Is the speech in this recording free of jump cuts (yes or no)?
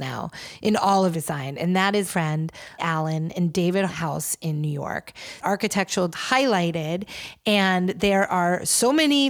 no